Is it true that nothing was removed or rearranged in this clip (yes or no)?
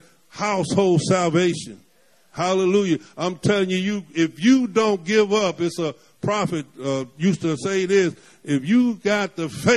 yes